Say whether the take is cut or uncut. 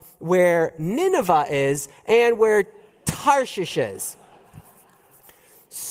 uncut